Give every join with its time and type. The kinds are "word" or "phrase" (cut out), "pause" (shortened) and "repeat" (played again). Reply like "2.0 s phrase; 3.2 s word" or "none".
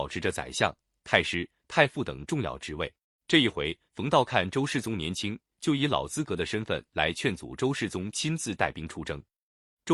3.0 s pause